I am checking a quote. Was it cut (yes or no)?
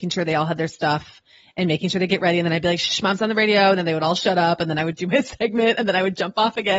no